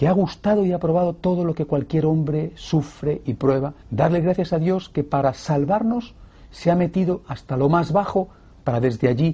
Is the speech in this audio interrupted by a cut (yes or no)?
yes